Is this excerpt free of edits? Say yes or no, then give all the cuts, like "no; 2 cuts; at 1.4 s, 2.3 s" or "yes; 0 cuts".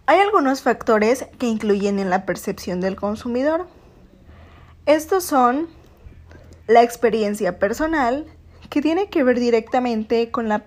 no; 1 cut; at 6.6 s